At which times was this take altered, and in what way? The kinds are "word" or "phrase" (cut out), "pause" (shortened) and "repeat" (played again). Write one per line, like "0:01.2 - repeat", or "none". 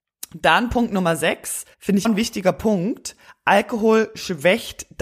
0:01.7 - pause
0:02.0 - word